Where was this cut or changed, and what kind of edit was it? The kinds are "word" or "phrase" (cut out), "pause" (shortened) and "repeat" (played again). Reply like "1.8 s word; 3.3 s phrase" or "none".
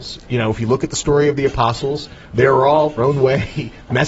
2.2 s pause; 3.0 s phrase

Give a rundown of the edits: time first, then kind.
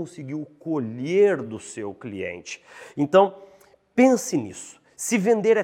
none

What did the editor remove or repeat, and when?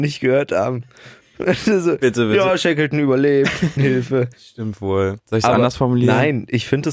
3.8 s phrase; 4.3 s pause; 5.2 s pause

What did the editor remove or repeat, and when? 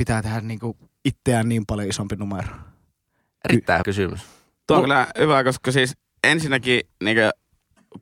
3.8 s word

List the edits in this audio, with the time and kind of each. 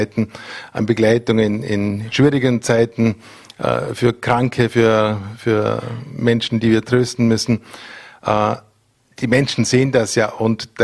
none

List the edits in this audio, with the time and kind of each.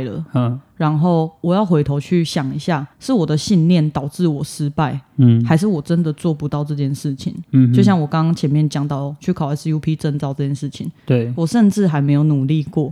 2.9 s pause

